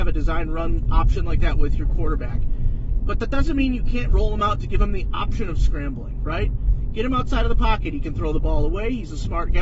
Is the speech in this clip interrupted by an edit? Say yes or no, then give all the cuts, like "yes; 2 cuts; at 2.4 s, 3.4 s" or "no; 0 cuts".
no; 0 cuts